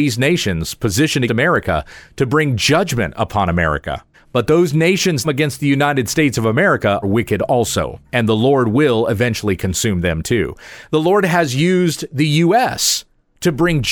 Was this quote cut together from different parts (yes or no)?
yes